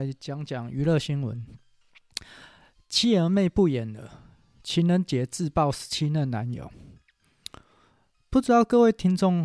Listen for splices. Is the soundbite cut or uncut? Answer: uncut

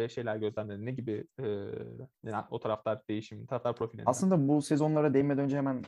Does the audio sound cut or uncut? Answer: cut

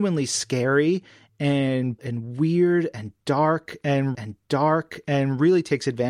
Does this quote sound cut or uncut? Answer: cut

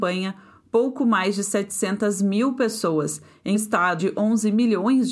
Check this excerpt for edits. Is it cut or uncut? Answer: cut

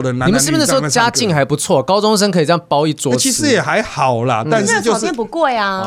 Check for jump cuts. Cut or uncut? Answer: uncut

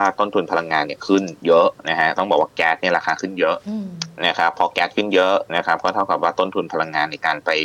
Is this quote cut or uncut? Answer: uncut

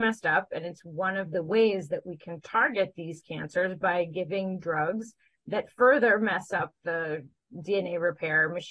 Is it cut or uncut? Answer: uncut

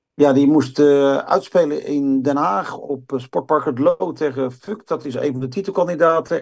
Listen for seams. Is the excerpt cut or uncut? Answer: uncut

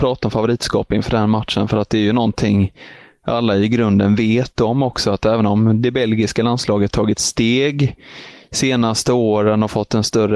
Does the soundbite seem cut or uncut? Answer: uncut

